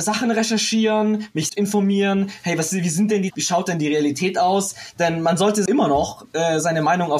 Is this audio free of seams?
no; 3 cuts; at 1.5 s, 3.3 s, 5.7 s

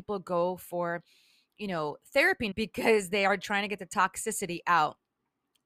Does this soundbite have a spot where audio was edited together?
yes; 1 cut; at 2.5 s

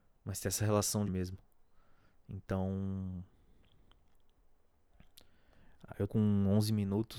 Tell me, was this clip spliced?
yes; 2 cuts; at 1.1 s, 6.1 s

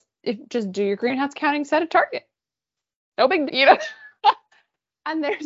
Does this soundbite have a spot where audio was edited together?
yes; 3 cuts; at 1.3 s, 3.5 s, 4.2 s

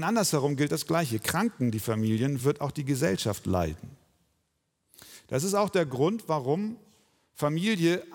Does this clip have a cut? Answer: no; 0 cuts

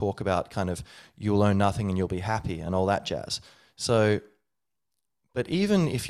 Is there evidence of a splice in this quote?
no; 0 cuts

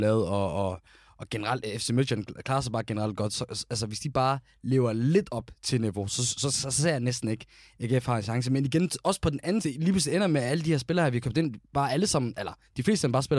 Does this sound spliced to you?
yes; 1 cut; at 9.6 s

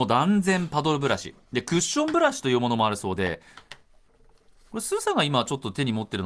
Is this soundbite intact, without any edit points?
yes; 0 cuts

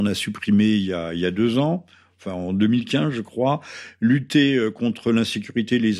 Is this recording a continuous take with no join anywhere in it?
yes; 0 cuts

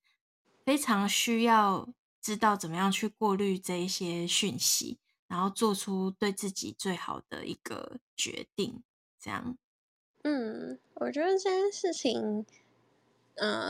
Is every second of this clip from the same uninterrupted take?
yes; 0 cuts

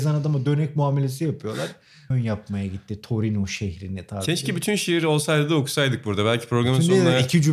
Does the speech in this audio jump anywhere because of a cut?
yes; 1 cut; at 2.1 s

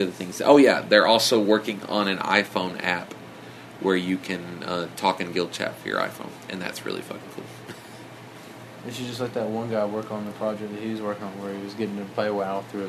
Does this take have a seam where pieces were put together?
no; 0 cuts

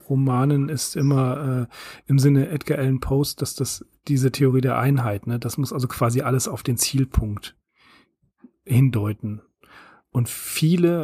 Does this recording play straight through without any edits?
yes; 0 cuts

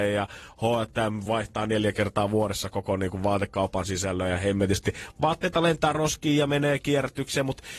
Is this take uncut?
yes; 0 cuts

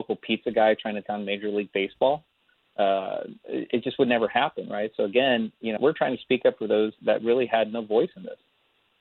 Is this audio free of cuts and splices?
no; 3 cuts; at 1.0 s, 5.8 s, 7.0 s

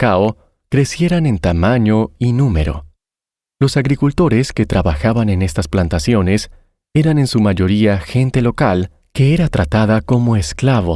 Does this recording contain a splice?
no; 0 cuts

